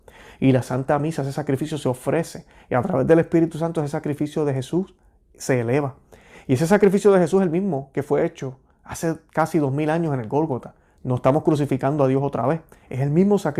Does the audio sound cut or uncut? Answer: uncut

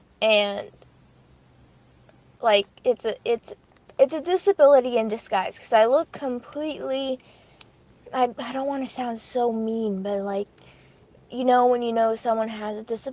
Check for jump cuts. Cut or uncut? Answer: uncut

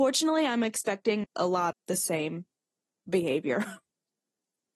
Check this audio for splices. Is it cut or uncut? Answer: cut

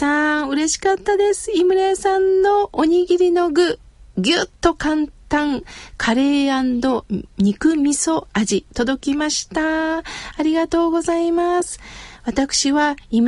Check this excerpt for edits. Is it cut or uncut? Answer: cut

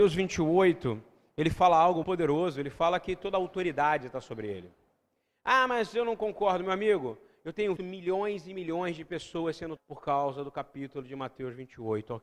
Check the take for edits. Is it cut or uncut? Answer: cut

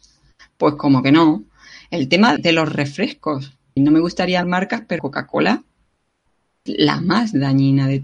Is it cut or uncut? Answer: cut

